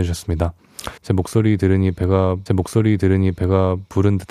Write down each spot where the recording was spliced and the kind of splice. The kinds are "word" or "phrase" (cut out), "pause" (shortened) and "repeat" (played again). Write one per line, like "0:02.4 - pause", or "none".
0:01.0 - pause
0:02.5 - repeat